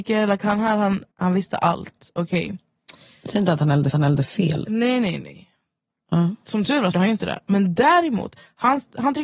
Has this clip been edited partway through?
yes; 3 cuts; at 1.1 s, 3.9 s, 6.9 s

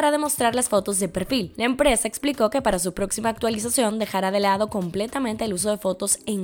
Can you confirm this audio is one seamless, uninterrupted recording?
yes; 0 cuts

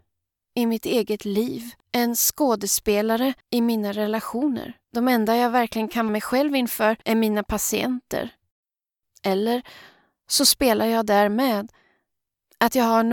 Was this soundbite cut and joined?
yes; 6 cuts; at 1.8 s, 3.4 s, 4.8 s, 6.1 s, 7.0 s, 8.6 s

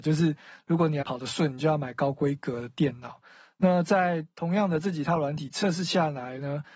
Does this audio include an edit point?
yes; 1 cut; at 1.0 s

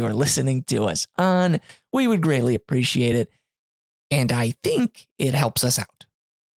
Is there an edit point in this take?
no; 0 cuts

